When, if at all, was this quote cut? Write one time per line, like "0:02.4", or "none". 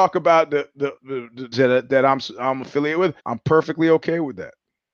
0:01.0
0:01.5
0:03.2